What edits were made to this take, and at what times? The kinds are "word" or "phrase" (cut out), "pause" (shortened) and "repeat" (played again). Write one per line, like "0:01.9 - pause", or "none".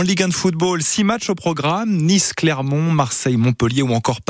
none